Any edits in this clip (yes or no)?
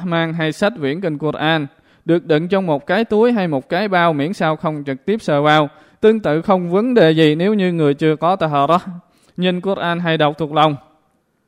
no